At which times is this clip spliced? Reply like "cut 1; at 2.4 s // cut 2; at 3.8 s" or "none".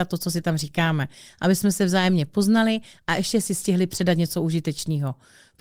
none